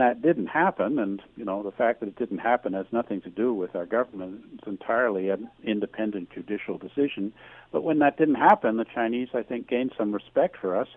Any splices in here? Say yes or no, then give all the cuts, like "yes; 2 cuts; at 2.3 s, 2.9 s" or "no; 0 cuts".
yes; 1 cut; at 1.3 s